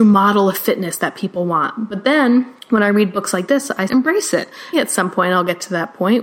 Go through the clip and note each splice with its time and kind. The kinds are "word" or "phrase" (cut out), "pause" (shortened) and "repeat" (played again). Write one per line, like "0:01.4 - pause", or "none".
0:02.6 - pause
0:03.9 - phrase
0:04.7 - word